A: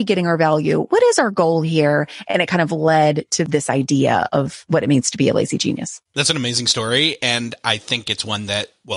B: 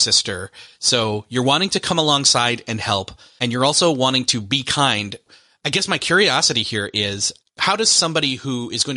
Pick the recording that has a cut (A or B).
A